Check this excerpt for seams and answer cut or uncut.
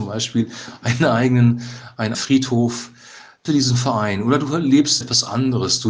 cut